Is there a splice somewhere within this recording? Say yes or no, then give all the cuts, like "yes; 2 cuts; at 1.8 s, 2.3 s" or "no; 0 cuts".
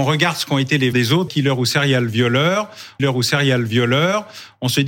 yes; 3 cuts; at 0.9 s, 1.3 s, 3.0 s